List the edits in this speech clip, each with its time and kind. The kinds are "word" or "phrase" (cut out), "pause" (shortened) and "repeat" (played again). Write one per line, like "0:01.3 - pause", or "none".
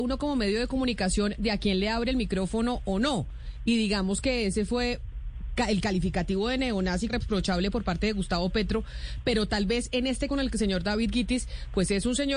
0:07.1 - word
0:10.3 - word